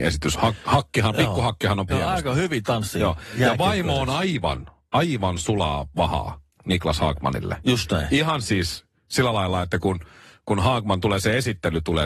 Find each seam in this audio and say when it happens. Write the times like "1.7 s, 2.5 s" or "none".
1.9 s